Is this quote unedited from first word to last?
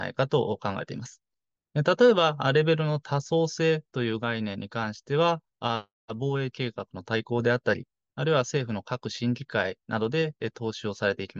yes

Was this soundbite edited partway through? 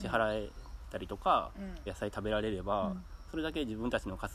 yes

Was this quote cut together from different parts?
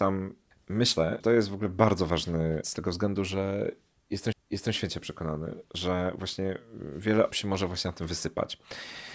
yes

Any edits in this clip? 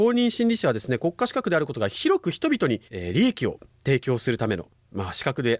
yes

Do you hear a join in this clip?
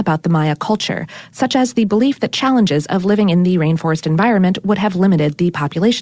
no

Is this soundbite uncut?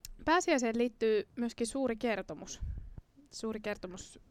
no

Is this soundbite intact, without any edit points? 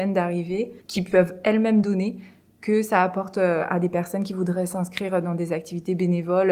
yes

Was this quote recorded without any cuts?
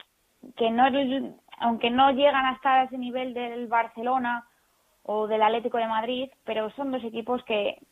yes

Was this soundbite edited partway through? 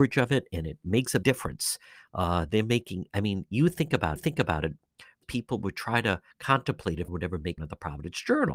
yes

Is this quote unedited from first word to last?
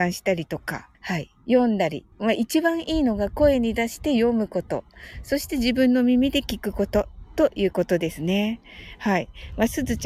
no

